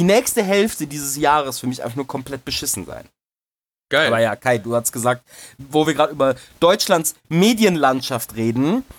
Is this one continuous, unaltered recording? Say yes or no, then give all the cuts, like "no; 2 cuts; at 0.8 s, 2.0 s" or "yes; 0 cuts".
yes; 0 cuts